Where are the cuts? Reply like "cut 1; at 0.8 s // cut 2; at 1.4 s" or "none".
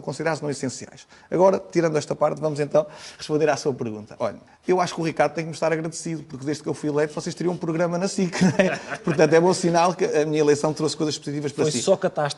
cut 1; at 4.5 s